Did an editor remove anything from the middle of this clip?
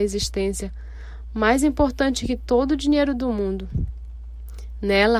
no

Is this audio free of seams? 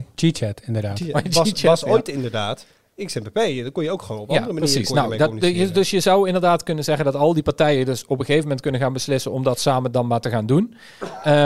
yes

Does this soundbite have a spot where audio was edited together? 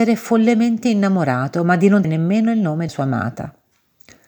yes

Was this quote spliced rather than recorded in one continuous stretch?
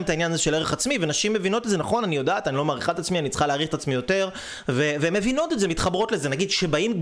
no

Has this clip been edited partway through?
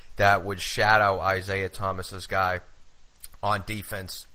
no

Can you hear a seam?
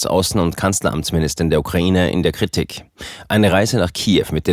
no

